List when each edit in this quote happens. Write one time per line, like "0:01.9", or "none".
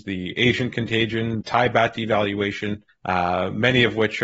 0:01.4
0:02.9